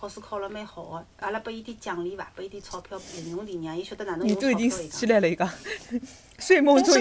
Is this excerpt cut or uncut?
cut